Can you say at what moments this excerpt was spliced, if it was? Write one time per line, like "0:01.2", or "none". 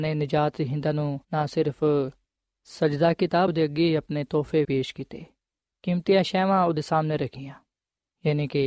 0:01.2
0:03.5
0:04.6